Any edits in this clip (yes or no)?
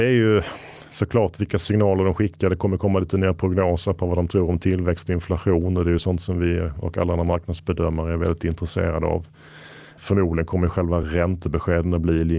no